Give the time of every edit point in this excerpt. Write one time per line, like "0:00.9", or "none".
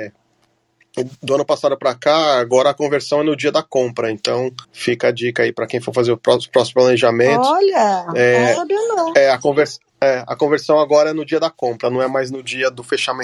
0:04.6
0:09.9